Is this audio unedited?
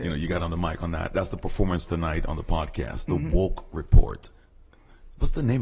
yes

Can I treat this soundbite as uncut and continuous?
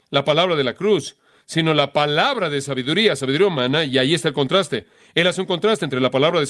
yes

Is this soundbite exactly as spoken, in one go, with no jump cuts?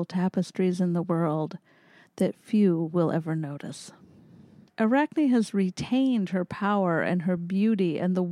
yes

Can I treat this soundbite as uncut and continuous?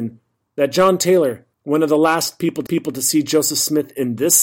no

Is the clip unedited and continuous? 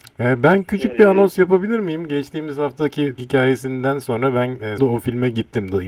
no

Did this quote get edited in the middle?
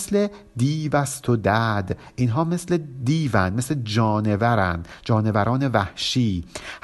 no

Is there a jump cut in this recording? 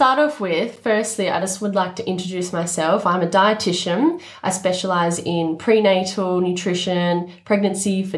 no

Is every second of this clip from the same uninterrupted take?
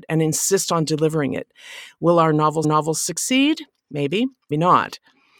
no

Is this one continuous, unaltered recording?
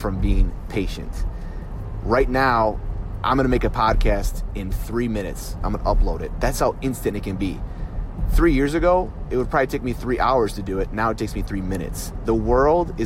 yes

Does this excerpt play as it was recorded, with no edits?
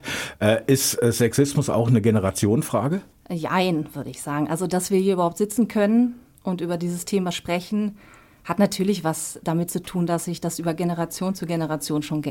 yes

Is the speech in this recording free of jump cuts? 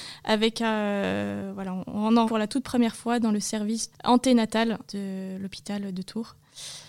no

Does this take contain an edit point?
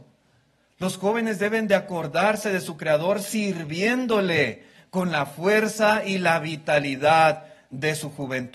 no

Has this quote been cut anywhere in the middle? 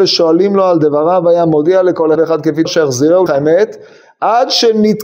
yes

